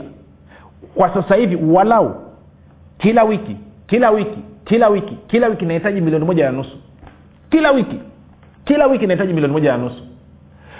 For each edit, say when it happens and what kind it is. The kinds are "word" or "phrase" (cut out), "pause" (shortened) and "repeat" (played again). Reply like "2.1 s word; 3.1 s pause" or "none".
none